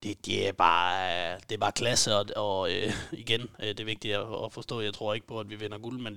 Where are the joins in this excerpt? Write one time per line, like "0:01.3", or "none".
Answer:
none